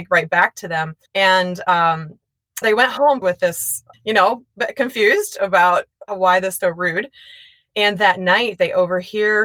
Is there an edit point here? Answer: yes; 6 cuts; at 1.1 s, 2.6 s, 3.2 s, 3.9 s, 6.1 s, 6.6 s

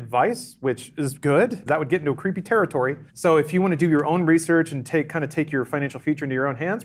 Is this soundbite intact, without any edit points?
no; 2 cuts; at 1.7 s, 3.1 s

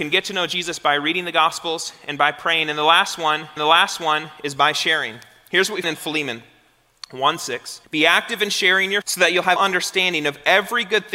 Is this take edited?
yes; 5 cuts; at 3.6 s, 5.8 s, 7.8 s, 9.0 s, 9.6 s

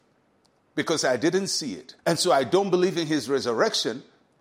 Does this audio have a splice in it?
yes; 1 cut; at 2.0 s

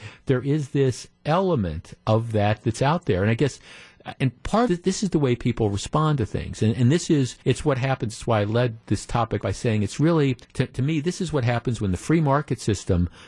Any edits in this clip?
yes; 6 cuts; at 2.0 s, 4.2 s, 4.7 s, 7.4 s, 9.4 s, 10.4 s

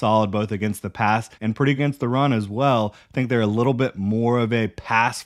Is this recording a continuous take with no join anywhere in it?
no; 2 cuts; at 1.3 s, 1.8 s

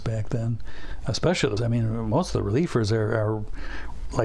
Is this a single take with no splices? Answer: no; 1 cut; at 1.6 s

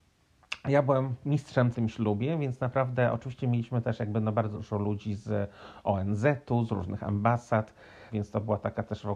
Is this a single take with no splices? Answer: no; 3 cuts; at 1.7 s, 4.5 s, 8.1 s

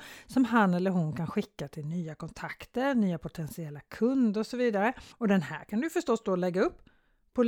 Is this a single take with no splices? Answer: no; 1 cut; at 5.1 s

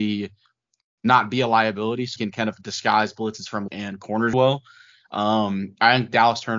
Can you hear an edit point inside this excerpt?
yes; 3 cuts; at 2.2 s, 3.7 s, 4.3 s

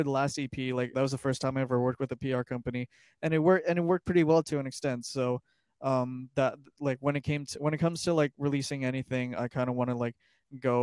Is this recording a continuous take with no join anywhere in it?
no; 1 cut; at 0.9 s

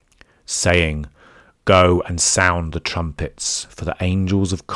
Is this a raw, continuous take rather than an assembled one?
yes; 0 cuts

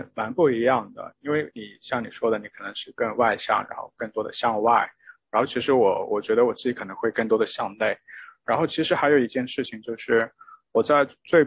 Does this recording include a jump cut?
no; 0 cuts

